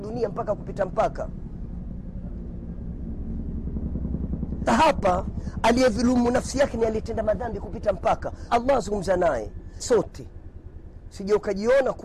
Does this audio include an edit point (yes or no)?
yes